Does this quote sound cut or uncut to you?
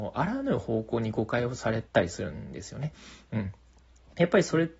cut